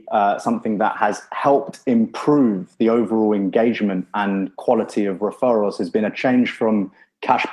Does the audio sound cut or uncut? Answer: uncut